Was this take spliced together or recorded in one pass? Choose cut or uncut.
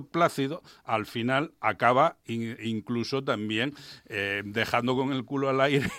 cut